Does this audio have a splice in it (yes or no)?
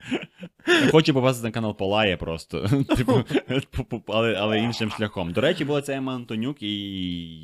no